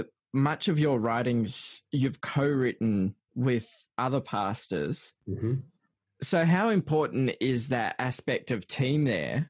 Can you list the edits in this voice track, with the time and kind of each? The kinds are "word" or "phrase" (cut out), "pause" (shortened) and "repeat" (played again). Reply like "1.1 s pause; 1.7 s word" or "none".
3.9 s pause; 5.2 s pause